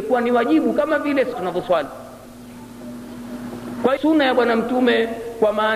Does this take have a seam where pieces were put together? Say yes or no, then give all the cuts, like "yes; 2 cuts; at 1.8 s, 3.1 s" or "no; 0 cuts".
yes; 2 cuts; at 1.3 s, 4.0 s